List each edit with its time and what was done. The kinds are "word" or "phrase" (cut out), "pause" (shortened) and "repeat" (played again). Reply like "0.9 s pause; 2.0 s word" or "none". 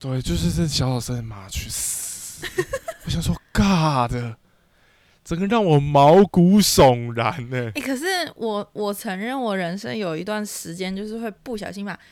none